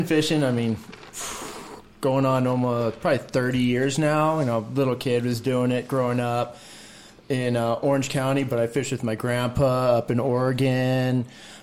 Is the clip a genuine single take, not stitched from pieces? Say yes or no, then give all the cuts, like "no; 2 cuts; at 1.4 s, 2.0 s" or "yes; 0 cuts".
yes; 0 cuts